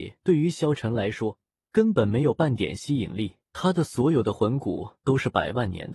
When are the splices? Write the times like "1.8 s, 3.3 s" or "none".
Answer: 3.4 s